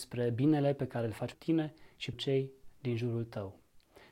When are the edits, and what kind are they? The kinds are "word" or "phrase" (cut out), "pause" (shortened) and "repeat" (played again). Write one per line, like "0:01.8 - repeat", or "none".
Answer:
0:01.3 - word
0:02.1 - word